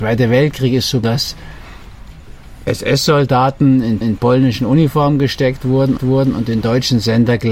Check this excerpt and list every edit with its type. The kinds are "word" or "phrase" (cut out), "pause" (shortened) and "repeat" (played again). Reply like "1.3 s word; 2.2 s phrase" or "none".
1.0 s word; 4.0 s repeat; 6.0 s repeat

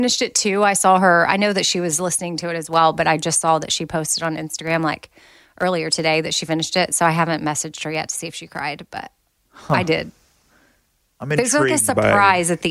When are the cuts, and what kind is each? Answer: none

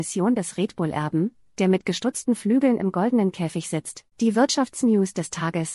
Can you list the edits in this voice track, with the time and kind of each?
4.1 s pause

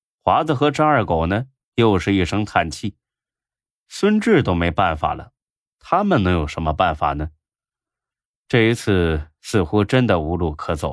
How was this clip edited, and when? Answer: none

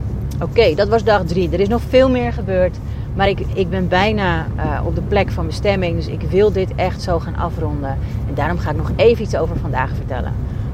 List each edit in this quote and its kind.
none

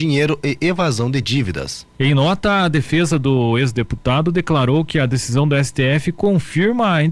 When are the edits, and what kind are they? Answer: none

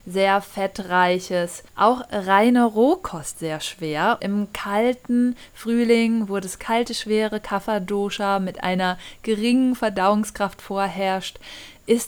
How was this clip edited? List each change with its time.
1.7 s pause; 3.3 s word; 4.2 s word

